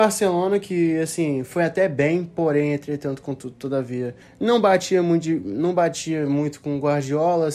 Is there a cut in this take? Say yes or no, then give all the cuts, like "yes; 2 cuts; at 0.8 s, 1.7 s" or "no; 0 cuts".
yes; 1 cut; at 4.2 s